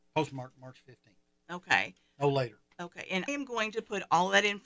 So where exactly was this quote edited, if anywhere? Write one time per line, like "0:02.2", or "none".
0:03.3